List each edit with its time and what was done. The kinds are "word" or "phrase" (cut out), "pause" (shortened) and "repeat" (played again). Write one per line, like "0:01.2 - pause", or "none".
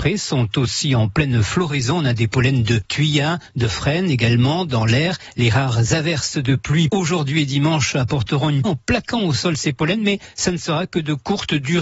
0:06.9 - word
0:08.6 - phrase